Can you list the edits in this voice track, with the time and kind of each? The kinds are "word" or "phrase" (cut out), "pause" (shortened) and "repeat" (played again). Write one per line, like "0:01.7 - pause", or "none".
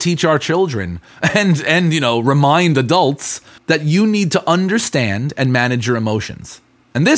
0:03.6 - pause